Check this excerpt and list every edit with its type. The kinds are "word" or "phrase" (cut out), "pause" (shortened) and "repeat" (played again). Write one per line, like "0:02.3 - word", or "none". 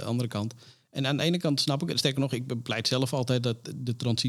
none